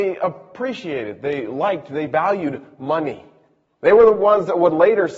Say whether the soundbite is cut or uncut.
uncut